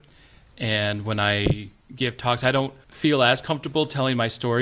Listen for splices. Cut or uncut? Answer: uncut